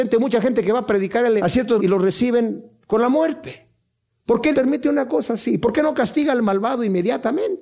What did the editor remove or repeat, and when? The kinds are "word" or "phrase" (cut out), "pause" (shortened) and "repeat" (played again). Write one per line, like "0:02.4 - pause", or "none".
0:01.4 - word
0:01.8 - word
0:04.5 - word